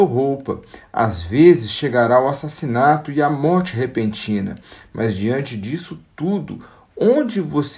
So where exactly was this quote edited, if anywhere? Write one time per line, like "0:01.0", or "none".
none